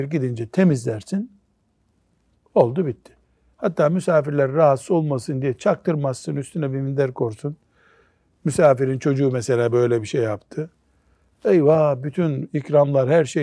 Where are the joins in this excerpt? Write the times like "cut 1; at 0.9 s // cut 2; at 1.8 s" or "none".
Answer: none